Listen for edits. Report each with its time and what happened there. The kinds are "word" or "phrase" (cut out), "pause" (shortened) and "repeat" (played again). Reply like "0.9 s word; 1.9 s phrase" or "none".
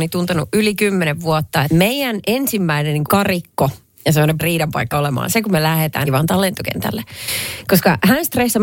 1.7 s word; 3.1 s word; 4.4 s word; 4.9 s word; 6.1 s word